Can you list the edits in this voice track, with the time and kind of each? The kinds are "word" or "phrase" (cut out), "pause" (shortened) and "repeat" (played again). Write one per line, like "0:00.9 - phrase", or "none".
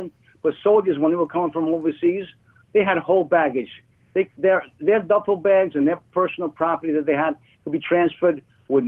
none